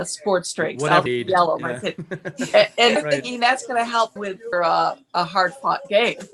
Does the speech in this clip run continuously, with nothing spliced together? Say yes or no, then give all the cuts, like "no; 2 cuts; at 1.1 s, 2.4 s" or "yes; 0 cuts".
no; 4 cuts; at 1.1 s, 3.0 s, 4.2 s, 4.5 s